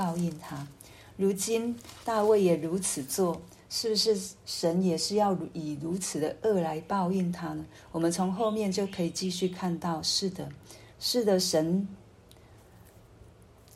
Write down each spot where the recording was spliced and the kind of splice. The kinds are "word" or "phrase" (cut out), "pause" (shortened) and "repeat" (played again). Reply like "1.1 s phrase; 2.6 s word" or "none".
10.9 s pause